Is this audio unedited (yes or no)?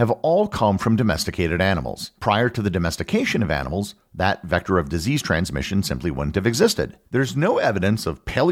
no